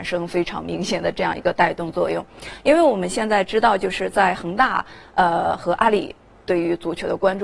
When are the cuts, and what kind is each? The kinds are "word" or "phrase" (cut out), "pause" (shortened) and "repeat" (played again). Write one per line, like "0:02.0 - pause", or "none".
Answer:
none